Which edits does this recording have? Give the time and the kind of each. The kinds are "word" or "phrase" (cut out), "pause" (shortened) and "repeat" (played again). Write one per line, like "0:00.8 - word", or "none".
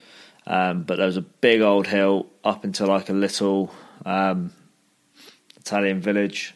none